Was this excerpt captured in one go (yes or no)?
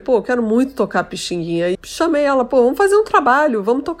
no